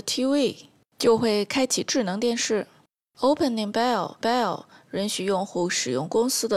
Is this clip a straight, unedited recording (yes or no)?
no